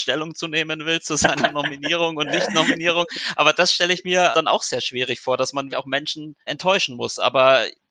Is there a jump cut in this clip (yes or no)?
yes